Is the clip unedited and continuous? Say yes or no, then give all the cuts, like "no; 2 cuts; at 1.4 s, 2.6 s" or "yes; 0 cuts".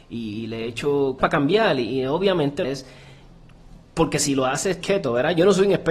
no; 3 cuts; at 1.2 s, 2.6 s, 4.8 s